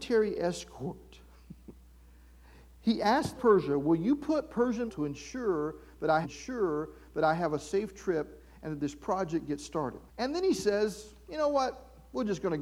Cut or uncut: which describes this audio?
cut